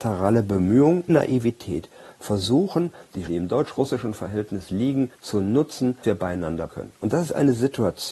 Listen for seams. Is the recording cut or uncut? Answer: cut